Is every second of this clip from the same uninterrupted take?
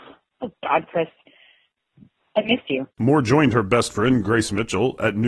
yes; 0 cuts

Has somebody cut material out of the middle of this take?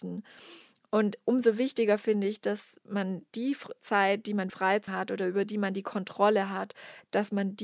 yes; 2 cuts; at 4.5 s, 4.9 s

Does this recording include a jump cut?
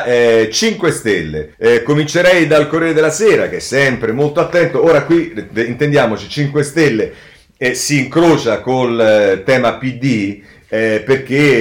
yes; 1 cut; at 1.5 s

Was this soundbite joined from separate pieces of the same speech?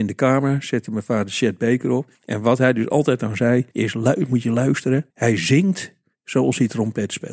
yes; 3 cuts; at 2.1 s, 3.7 s, 5.1 s

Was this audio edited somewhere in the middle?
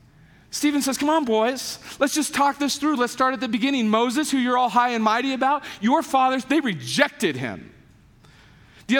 no; 0 cuts

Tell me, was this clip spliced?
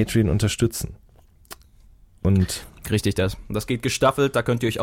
no; 0 cuts

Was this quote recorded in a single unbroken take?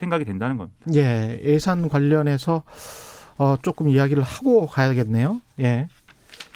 yes; 0 cuts

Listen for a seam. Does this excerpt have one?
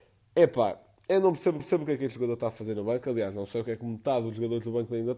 yes; 1 cut; at 1.6 s

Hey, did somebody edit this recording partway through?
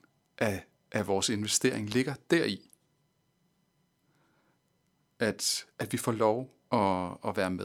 no; 0 cuts

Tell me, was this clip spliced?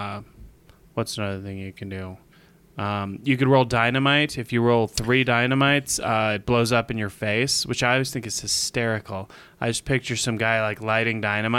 no; 0 cuts

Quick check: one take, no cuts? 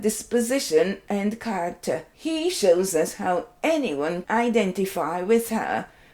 no; 2 cuts; at 2.1 s, 4.2 s

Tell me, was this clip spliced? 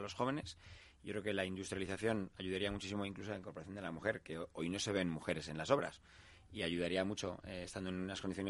no; 0 cuts

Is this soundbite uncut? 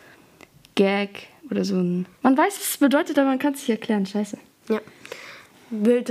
no; 2 cuts; at 1.4 s, 2.1 s

